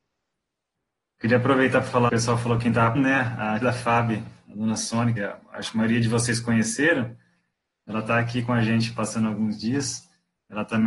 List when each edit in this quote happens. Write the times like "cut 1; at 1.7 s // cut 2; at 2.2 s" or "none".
cut 1; at 2.1 s // cut 2; at 2.9 s // cut 3; at 3.6 s // cut 4; at 5.2 s

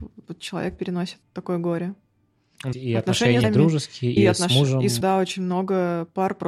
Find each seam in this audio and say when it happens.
cut 1; at 1.2 s // cut 2; at 2.7 s // cut 3; at 3.4 s // cut 4; at 4.2 s // cut 5; at 5.0 s

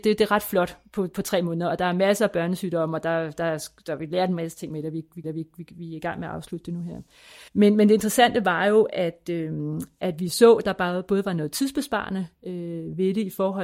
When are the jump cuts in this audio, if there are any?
cut 1; at 5.2 s // cut 2; at 7.5 s

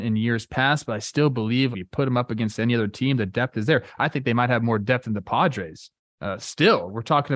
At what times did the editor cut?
cut 1; at 1.7 s // cut 2; at 6.0 s

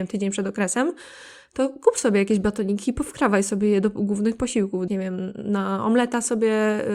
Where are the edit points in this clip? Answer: cut 1; at 4.9 s

